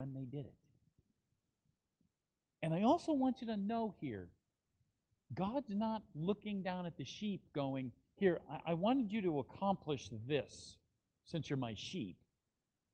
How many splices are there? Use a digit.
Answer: 0